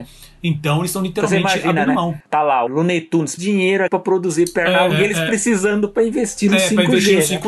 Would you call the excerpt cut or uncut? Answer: cut